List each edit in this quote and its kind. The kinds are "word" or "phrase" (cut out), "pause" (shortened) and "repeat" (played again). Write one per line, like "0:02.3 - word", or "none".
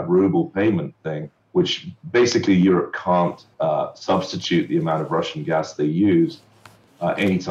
0:01.4 - pause
0:03.5 - pause

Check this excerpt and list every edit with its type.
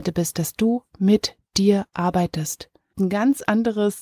0:02.9 - word

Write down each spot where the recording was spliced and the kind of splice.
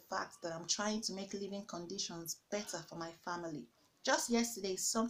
0:03.8 - pause

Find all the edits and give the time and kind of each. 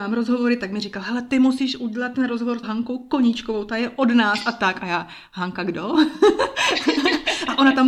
0:02.6 - word

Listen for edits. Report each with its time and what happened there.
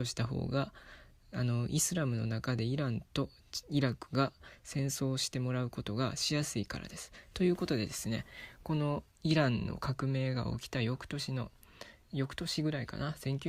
0:09.1 - pause
0:12.0 - pause

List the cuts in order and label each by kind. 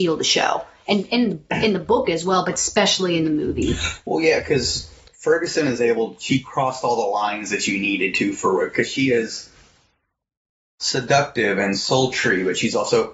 none

